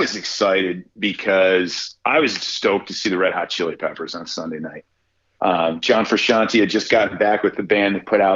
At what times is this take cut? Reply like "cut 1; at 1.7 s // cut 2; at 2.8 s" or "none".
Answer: none